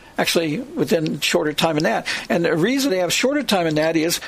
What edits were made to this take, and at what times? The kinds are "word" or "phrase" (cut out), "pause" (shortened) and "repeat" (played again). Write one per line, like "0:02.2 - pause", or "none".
0:02.9 - word